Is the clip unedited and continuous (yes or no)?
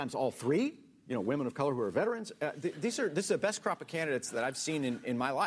yes